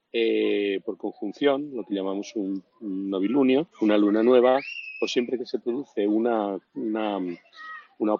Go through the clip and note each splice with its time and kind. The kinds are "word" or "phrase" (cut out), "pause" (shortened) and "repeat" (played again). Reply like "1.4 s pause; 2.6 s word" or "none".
3.7 s pause